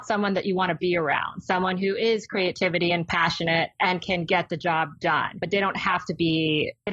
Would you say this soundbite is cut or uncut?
uncut